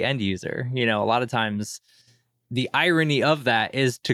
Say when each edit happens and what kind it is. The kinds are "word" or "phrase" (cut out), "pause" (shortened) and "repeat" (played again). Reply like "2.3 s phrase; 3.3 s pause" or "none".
none